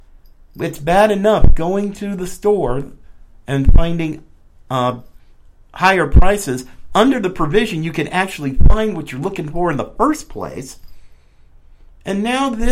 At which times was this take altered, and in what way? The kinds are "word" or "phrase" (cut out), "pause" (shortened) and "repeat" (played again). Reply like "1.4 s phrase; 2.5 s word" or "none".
none